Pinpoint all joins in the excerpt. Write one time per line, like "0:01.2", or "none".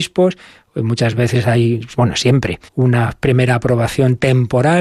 0:02.7

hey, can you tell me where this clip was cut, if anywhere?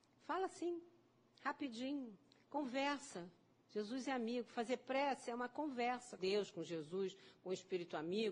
0:06.2

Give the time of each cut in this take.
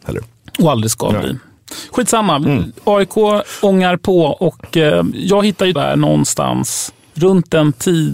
0:05.1
0:05.8

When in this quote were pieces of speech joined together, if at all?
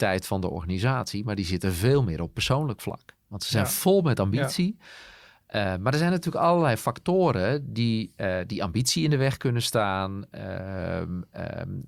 none

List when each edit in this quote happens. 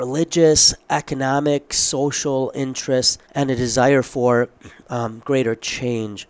0:03.2

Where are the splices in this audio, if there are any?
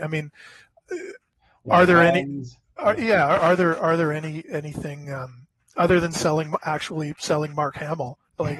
none

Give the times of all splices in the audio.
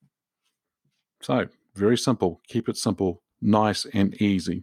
0:03.3

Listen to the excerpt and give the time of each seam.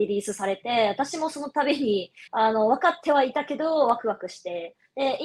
0:02.3

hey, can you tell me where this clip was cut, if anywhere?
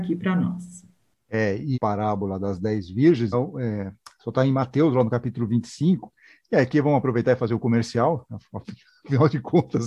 0:01.7
0:03.3

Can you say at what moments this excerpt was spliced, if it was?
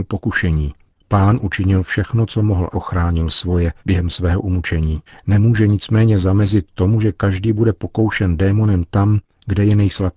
0:00.9
0:02.7
0:03.8
0:05.1

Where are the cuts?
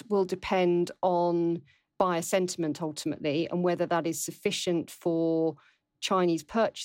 none

